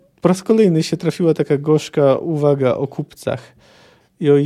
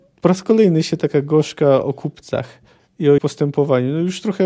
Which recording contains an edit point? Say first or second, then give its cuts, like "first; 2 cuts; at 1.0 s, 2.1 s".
second; 4 cuts; at 1.0 s, 1.8 s, 2.7 s, 3.2 s